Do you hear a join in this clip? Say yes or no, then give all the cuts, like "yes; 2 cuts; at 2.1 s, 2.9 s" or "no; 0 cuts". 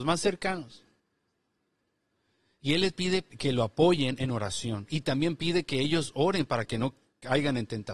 yes; 1 cut; at 3.3 s